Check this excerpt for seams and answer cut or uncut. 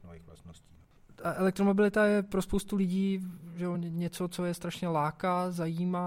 uncut